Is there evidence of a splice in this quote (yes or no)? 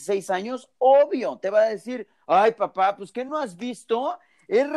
no